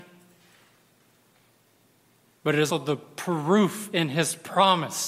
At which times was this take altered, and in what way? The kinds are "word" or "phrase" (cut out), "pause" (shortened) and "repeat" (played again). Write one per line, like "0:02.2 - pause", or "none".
0:02.7 - word